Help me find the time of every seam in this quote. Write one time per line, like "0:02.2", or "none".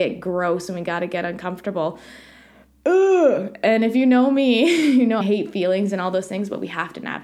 0:05.2

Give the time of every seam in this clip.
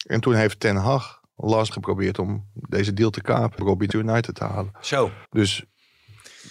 0:01.7
0:03.6
0:03.9
0:05.2

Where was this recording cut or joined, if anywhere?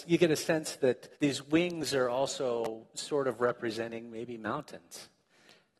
0:01.1

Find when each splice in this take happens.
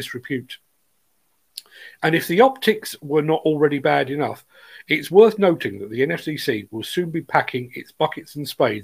none

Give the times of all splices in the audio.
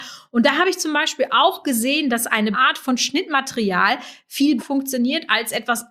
0:02.5
0:04.6

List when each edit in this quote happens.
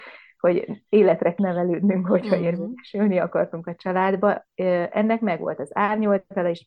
0:01.4

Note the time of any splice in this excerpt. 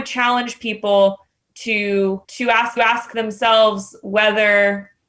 0:02.2
0:02.8

